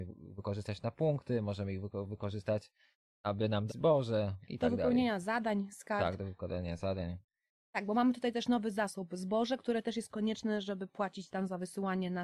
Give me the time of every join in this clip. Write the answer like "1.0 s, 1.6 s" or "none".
3.7 s